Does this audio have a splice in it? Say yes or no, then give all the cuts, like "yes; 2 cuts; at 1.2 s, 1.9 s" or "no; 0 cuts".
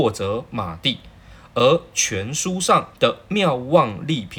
yes; 1 cut; at 2.9 s